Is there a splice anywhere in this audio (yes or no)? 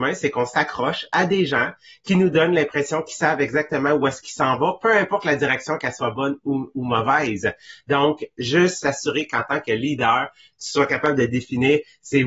no